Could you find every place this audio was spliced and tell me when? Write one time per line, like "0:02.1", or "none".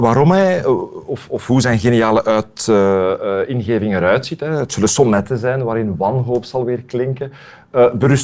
none